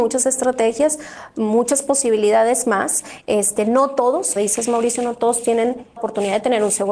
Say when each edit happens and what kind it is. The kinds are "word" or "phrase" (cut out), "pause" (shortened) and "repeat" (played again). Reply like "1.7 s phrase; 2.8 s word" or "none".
4.4 s word; 6.0 s word